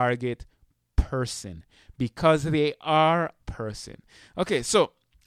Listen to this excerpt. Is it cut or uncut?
cut